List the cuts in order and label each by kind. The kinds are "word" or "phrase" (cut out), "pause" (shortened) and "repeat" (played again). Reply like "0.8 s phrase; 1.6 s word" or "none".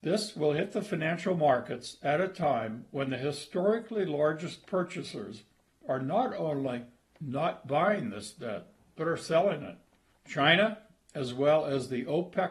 none